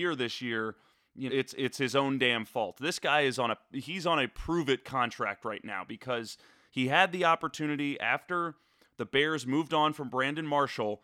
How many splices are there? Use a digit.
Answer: 1